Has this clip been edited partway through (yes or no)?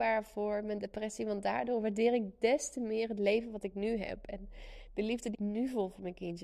yes